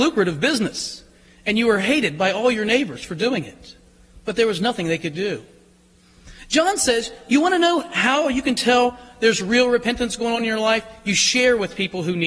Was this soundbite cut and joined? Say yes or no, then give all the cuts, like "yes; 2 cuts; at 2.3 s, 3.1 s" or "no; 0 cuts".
no; 0 cuts